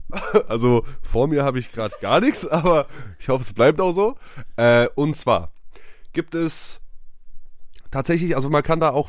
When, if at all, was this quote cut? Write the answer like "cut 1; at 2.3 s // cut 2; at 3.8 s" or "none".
none

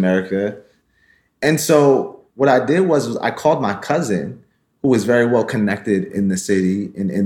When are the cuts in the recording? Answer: cut 1; at 2.3 s

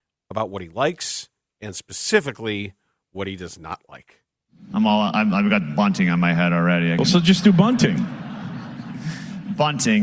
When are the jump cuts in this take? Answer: none

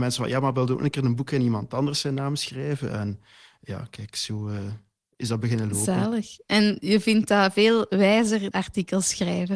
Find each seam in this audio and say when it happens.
cut 1; at 8.5 s

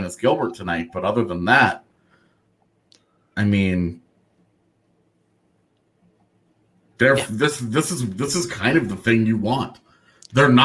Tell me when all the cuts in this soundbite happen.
none

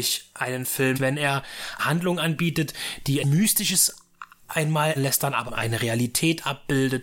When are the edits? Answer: cut 1; at 0.9 s // cut 2; at 1.8 s // cut 3; at 3.2 s // cut 4; at 4.5 s // cut 5; at 5.0 s // cut 6; at 5.5 s

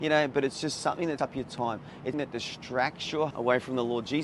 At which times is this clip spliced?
cut 1; at 1.2 s // cut 2; at 2.1 s // cut 3; at 3.3 s

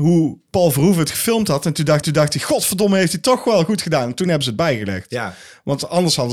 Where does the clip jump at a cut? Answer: cut 1; at 2.0 s

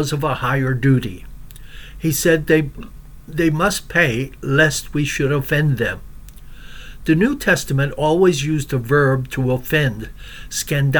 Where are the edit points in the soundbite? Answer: none

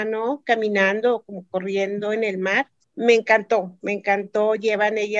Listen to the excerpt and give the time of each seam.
cut 1; at 2.8 s

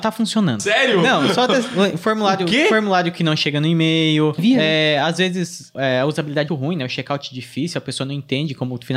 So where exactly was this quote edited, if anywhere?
cut 1; at 4.4 s // cut 2; at 6.5 s

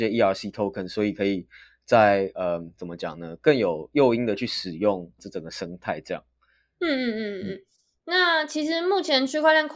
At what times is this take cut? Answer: cut 1; at 5.2 s

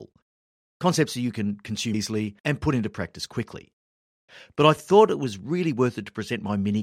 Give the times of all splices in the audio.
cut 1; at 1.9 s // cut 2; at 2.4 s

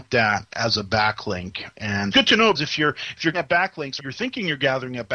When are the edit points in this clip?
cut 1; at 2.1 s // cut 2; at 2.5 s // cut 3; at 3.3 s // cut 4; at 4.0 s

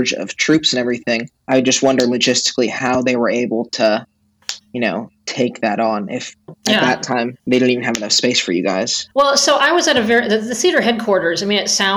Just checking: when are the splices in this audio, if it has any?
cut 1; at 1.4 s // cut 2; at 4.6 s // cut 3; at 7.4 s // cut 4; at 9.1 s

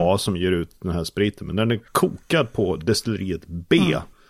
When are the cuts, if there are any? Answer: cut 1; at 1.9 s

